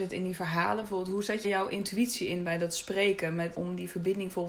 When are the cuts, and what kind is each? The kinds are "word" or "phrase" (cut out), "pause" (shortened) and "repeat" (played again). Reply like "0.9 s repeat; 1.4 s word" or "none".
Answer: 1.4 s word; 3.5 s word

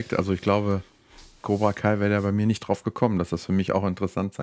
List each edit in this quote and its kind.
none

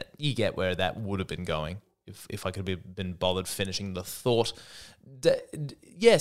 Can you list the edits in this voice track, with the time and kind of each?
none

